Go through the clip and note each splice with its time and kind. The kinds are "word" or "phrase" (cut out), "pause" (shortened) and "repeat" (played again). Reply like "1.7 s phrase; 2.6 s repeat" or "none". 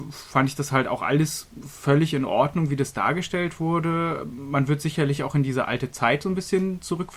none